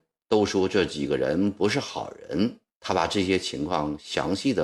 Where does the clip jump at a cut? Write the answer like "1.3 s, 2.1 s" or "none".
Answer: 2.7 s